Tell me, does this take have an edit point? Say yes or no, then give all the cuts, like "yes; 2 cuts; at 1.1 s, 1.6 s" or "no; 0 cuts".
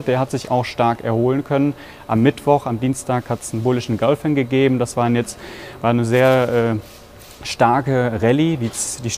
no; 0 cuts